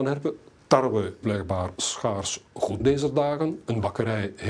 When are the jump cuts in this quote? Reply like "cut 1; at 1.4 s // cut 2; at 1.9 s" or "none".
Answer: cut 1; at 1.2 s // cut 2; at 1.8 s // cut 3; at 2.8 s